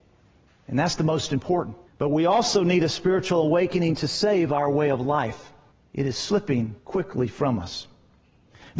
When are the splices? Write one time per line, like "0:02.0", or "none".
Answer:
0:01.9
0:05.7
0:06.8